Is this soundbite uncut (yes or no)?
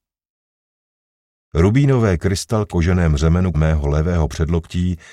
no